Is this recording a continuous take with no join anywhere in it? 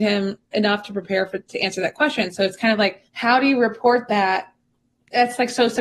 no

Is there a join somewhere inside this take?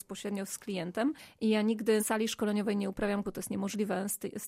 yes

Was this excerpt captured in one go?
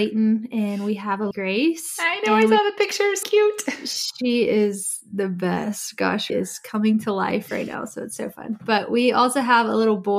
no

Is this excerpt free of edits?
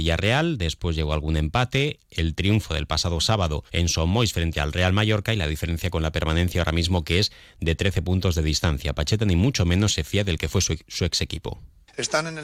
no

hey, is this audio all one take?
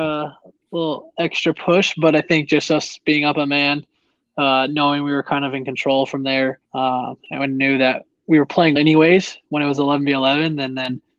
no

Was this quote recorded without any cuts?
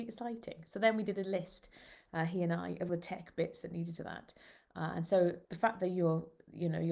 no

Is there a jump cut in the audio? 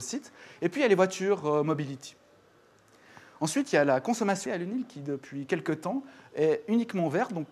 yes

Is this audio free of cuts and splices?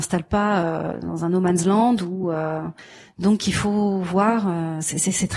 yes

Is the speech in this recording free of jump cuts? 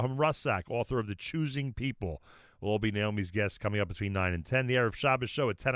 yes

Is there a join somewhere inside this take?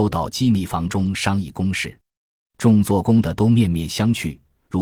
no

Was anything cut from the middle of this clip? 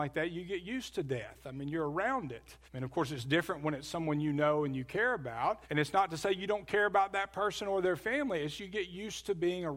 yes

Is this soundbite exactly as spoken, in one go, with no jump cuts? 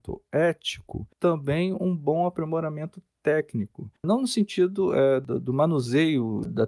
no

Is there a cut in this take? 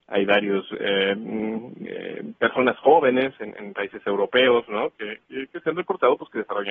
no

